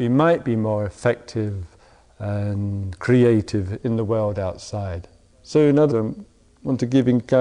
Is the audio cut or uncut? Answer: cut